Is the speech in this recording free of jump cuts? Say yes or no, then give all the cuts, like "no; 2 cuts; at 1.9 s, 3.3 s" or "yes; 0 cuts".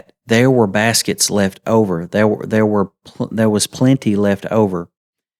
yes; 0 cuts